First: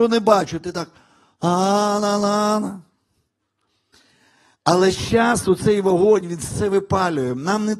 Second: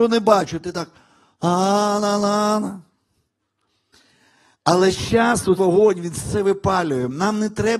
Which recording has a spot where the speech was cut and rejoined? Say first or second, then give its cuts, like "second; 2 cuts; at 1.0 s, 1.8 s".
second; 1 cut; at 5.6 s